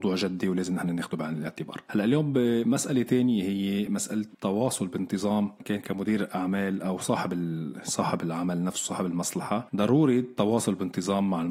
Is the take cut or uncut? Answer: uncut